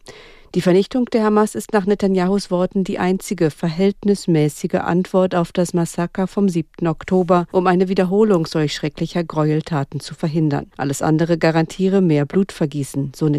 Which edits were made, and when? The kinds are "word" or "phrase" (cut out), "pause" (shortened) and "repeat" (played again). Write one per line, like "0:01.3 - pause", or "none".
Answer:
0:07.5 - pause
0:10.7 - pause